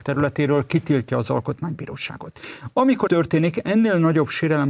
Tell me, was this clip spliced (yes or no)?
yes